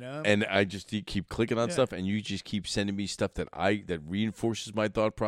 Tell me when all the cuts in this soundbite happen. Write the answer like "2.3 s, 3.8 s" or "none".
none